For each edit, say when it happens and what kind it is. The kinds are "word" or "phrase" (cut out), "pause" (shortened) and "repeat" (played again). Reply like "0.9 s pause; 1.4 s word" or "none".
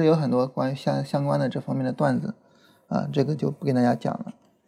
none